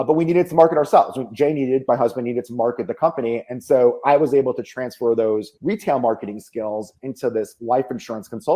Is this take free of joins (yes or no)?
no